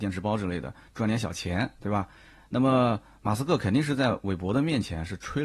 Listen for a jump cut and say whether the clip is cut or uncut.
uncut